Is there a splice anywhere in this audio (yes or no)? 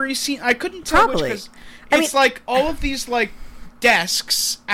no